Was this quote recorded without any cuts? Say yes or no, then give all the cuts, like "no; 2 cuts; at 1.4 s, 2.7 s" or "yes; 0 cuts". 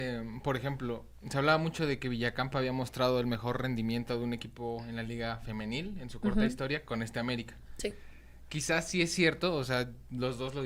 yes; 0 cuts